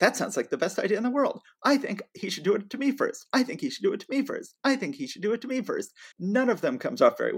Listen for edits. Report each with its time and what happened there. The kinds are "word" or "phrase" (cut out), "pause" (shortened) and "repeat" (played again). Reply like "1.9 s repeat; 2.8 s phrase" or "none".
6.1 s pause